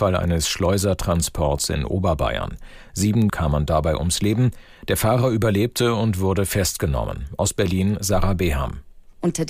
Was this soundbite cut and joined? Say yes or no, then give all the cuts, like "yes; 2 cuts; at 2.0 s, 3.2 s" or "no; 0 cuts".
yes; 1 cut; at 3.3 s